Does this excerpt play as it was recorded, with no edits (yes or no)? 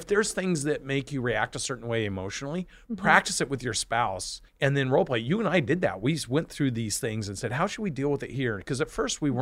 no